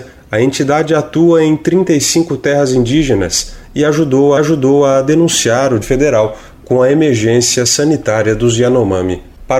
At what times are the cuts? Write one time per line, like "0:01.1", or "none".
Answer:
0:04.4
0:05.8

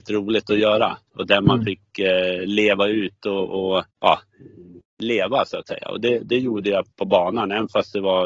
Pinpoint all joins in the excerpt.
0:03.9
0:06.9

